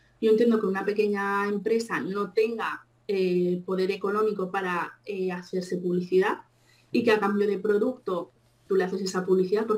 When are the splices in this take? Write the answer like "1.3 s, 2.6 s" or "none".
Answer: none